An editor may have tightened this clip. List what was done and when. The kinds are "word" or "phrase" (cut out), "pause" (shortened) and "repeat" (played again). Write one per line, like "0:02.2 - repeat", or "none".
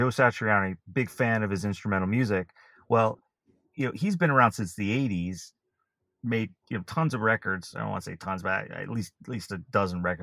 0:06.6 - pause